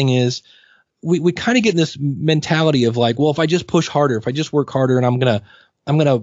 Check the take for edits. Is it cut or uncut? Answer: uncut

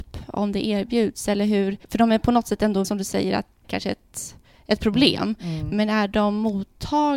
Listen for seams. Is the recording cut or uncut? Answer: cut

